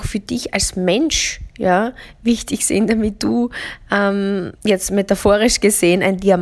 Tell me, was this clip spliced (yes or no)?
yes